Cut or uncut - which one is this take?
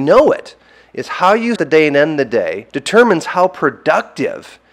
cut